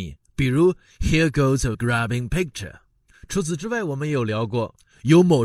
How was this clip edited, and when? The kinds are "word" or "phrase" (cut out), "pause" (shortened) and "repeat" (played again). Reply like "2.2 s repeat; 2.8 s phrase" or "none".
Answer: 1.7 s word